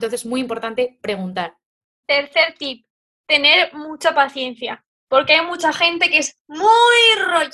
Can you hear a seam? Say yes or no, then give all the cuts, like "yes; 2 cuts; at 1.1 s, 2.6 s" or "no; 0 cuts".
no; 0 cuts